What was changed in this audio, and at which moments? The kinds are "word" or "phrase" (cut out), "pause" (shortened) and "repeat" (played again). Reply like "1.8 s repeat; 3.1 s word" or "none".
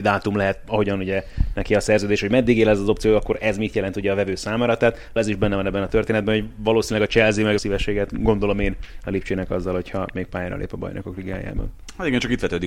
5.2 s word; 7.6 s phrase